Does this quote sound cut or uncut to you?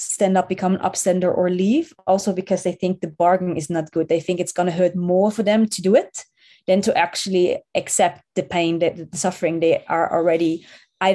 uncut